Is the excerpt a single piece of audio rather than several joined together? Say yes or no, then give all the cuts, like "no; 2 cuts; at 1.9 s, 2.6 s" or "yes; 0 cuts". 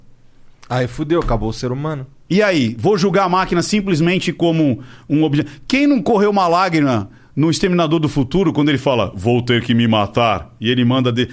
yes; 0 cuts